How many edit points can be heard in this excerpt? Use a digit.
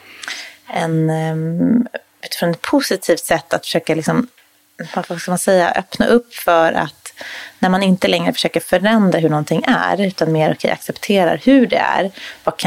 0